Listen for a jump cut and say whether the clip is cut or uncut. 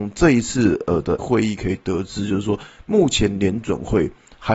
cut